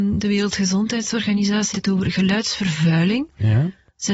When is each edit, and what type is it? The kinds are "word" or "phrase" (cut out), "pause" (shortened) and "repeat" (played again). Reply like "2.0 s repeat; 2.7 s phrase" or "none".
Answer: 1.7 s word